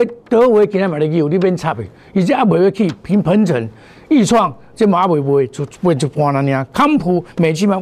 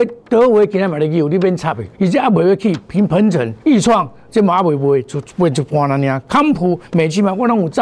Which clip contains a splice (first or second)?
second